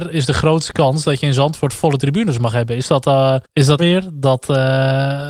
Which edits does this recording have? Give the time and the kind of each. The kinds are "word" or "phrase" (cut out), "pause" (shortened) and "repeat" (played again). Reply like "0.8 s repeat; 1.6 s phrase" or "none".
3.4 s pause; 3.8 s phrase